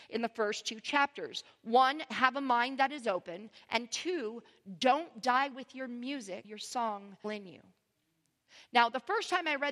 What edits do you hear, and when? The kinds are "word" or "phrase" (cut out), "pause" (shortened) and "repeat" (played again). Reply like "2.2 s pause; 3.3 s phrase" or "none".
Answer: 6.4 s word; 7.2 s word

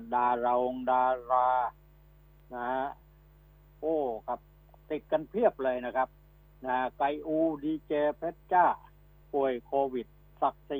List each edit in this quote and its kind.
none

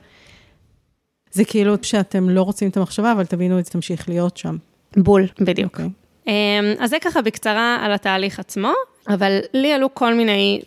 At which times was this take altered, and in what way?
1.8 s word; 3.7 s word; 5.3 s pause

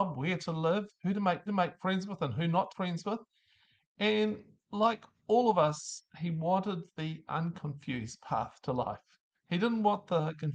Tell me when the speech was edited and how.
1.5 s repeat; 2.7 s phrase; 4.6 s pause; 9.3 s pause

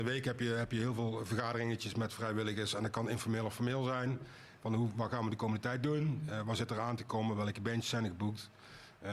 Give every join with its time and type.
none

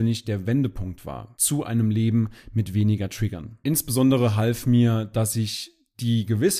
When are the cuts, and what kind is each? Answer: none

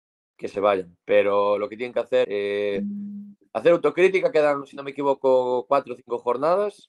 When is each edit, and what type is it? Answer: 2.2 s word

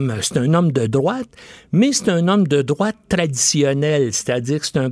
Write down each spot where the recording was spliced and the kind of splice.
none

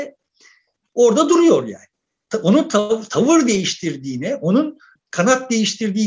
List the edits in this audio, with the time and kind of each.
none

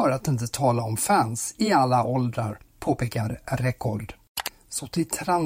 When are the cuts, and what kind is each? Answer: none

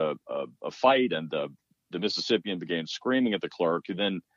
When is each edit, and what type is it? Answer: none

